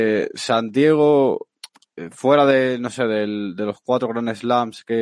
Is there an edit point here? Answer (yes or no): yes